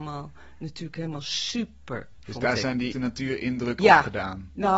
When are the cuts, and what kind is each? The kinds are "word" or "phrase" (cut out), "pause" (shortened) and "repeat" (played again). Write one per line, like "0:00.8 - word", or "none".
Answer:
0:02.9 - word
0:03.8 - word